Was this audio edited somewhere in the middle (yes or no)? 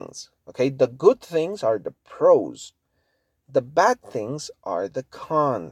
no